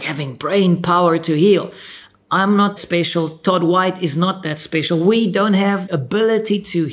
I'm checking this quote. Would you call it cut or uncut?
cut